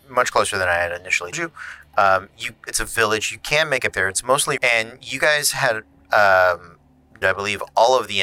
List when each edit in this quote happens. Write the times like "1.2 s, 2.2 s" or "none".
1.3 s, 2.7 s, 3.9 s, 4.6 s, 7.2 s